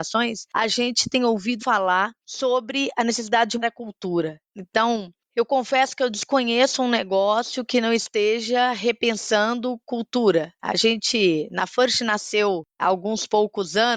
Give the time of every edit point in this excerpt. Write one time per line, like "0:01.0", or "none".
0:01.6
0:03.6
0:04.5